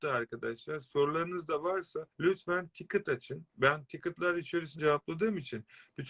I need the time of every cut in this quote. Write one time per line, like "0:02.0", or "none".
0:02.1
0:03.5
0:04.8